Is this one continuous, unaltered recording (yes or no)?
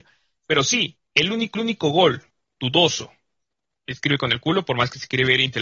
no